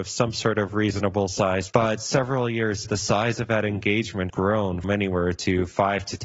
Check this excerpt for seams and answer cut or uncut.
cut